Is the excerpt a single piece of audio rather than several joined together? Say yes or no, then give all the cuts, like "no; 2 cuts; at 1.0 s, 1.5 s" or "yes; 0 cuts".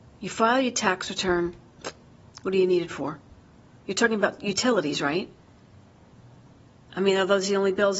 yes; 0 cuts